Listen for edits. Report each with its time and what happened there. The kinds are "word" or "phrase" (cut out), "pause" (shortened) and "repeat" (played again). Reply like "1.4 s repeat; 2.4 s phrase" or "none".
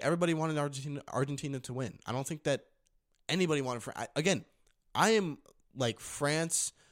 none